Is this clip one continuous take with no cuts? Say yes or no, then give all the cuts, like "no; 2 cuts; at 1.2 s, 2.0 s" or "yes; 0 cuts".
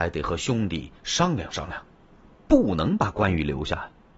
yes; 0 cuts